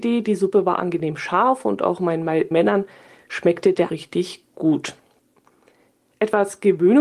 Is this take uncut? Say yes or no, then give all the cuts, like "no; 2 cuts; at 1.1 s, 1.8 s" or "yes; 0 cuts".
no; 2 cuts; at 2.5 s, 3.9 s